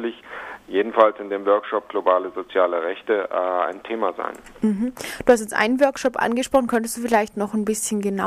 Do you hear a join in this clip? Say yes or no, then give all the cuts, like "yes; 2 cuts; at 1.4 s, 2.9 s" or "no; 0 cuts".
no; 0 cuts